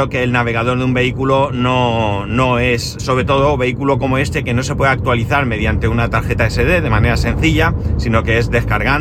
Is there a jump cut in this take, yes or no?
yes